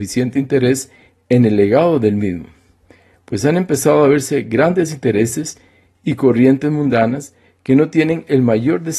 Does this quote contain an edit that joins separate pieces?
no; 0 cuts

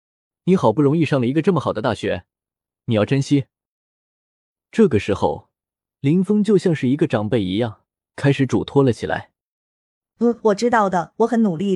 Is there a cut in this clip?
no; 0 cuts

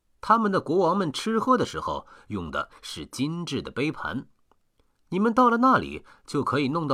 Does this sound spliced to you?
no; 0 cuts

